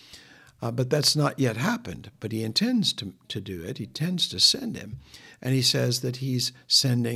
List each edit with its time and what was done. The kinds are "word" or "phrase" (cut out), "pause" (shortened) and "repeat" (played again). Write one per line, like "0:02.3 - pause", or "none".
none